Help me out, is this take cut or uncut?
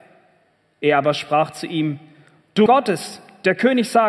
cut